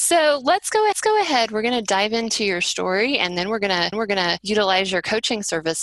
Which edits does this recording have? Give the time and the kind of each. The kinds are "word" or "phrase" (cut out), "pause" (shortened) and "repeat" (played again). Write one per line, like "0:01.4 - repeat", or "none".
0:00.9 - repeat
0:03.9 - repeat